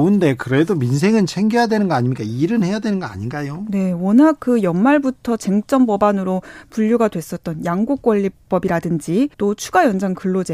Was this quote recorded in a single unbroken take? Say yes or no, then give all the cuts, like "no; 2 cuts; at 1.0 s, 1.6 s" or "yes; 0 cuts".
no; 1 cut; at 9.3 s